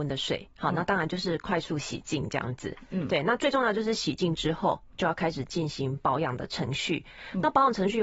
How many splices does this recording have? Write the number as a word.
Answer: zero